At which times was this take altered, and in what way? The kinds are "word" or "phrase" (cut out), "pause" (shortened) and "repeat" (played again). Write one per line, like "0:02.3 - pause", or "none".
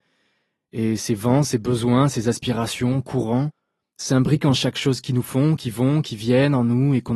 none